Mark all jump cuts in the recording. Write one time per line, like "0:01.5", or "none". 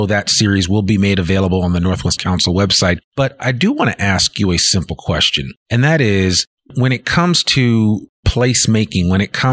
0:02.2